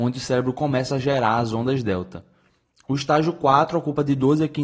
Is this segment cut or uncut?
uncut